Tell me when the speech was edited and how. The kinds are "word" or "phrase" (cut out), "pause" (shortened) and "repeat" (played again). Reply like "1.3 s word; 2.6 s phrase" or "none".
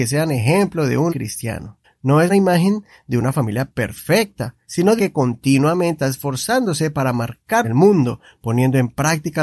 1.1 s word; 1.8 s pause; 2.3 s phrase; 4.6 s pause; 5.0 s phrase; 6.0 s word; 7.6 s phrase